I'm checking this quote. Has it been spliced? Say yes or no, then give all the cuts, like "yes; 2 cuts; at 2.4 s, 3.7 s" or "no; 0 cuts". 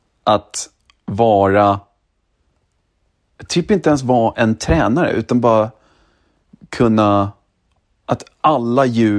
no; 0 cuts